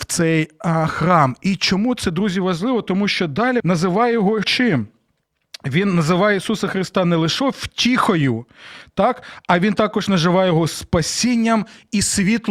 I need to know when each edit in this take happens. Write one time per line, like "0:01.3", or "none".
0:03.6
0:04.4